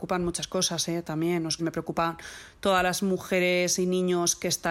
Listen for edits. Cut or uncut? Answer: cut